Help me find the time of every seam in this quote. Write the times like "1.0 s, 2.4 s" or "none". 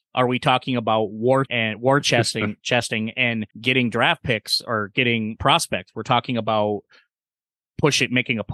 1.5 s, 3.5 s, 5.4 s